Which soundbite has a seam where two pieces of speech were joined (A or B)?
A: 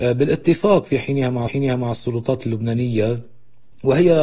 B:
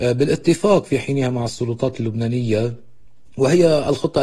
A